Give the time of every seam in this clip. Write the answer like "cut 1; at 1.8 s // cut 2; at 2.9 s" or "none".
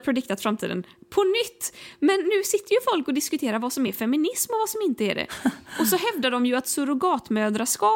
none